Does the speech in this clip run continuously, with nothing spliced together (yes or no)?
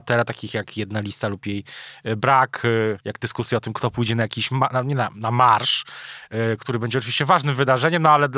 no